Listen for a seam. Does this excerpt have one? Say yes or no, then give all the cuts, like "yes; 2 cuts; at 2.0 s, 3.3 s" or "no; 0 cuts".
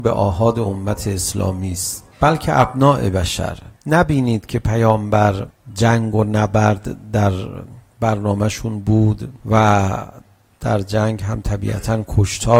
yes; 3 cuts; at 2.1 s, 3.8 s, 9.4 s